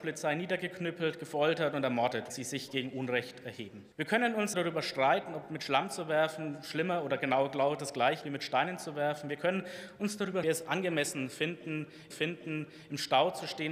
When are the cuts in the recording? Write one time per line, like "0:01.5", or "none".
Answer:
0:02.3
0:03.9
0:04.5
0:08.2
0:10.4
0:12.1